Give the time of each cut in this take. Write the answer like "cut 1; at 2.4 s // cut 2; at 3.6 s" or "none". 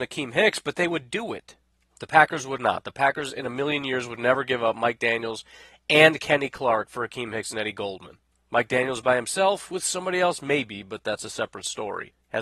none